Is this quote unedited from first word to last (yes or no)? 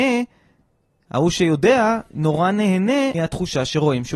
no